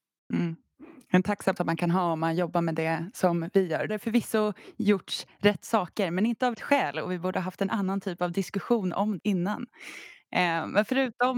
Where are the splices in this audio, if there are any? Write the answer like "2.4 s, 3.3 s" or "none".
1.6 s, 3.9 s, 6.5 s, 9.2 s